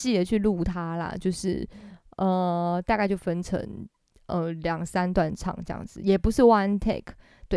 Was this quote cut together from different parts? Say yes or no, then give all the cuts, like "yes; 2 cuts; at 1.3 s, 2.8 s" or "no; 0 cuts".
no; 0 cuts